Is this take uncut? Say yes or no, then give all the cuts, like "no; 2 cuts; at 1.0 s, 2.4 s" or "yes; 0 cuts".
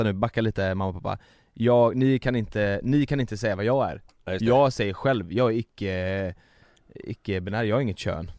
yes; 0 cuts